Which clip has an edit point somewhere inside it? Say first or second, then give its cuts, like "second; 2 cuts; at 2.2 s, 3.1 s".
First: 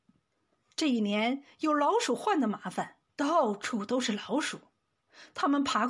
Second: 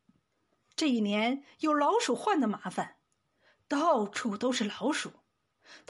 first; 1 cut; at 3.1 s